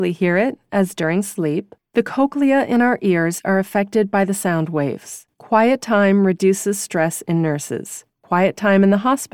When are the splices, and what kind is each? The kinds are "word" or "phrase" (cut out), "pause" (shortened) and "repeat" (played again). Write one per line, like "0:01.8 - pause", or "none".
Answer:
0:05.3 - pause
0:08.1 - pause